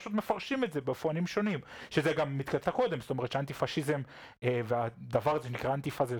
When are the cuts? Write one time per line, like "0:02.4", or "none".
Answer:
0:02.6